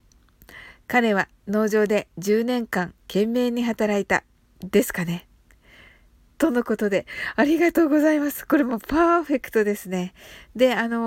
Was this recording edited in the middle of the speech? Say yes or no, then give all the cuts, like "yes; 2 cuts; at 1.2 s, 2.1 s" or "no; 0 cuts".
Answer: no; 0 cuts